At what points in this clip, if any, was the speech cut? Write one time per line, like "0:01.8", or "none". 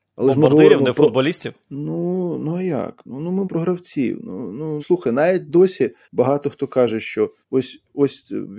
0:01.7
0:03.4
0:04.8
0:06.0
0:07.4